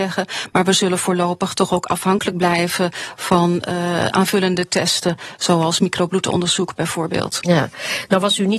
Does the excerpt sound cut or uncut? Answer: uncut